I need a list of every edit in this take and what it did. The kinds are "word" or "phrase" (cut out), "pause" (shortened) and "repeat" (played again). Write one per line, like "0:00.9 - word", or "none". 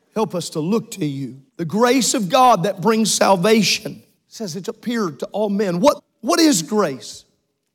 0:01.5 - pause
0:04.2 - pause
0:06.0 - word